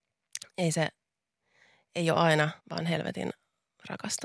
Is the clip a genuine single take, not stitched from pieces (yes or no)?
no